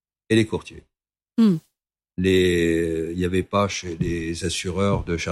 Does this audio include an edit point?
no; 0 cuts

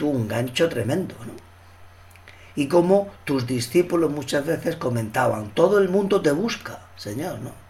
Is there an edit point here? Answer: no; 0 cuts

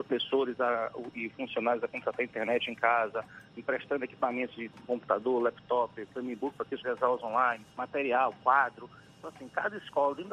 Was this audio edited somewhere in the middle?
yes; 2 cuts; at 6.8 s, 7.7 s

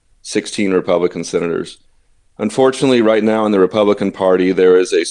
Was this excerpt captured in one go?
yes; 0 cuts

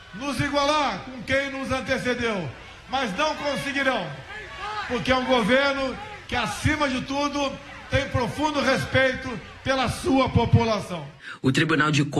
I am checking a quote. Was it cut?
no; 0 cuts

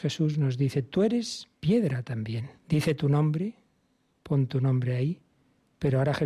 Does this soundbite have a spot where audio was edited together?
yes; 2 cuts; at 1.5 s, 2.6 s

